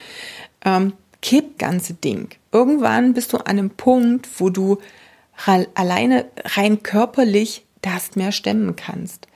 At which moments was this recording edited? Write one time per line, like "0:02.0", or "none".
0:01.6
0:08.1